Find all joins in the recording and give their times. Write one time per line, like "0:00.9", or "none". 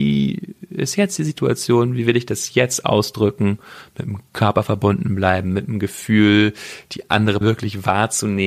0:07.4

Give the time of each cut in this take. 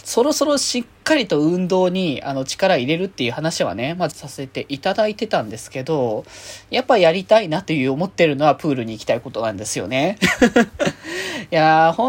0:04.1

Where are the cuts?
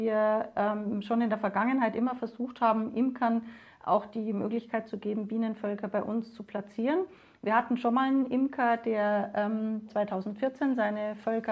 none

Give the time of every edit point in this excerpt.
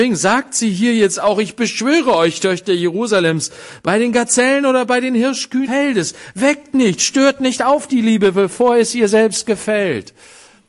0:05.6

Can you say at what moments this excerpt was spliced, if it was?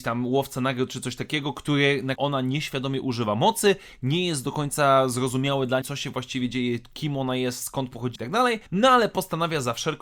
0:02.1
0:05.8
0:08.2
0:08.7

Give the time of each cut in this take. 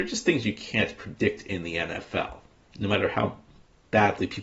none

